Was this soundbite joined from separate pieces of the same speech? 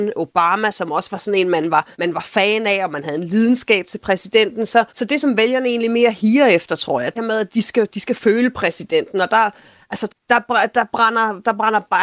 yes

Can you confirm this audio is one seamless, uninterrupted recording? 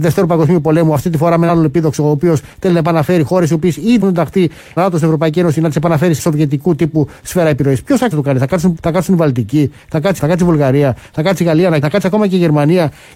no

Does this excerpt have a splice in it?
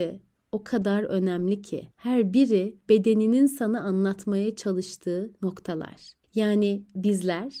yes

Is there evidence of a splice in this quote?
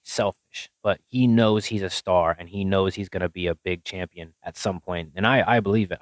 yes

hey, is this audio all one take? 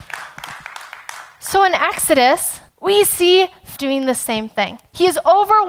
no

